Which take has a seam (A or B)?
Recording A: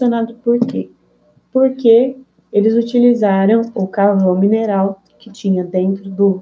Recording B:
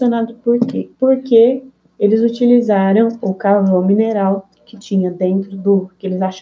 B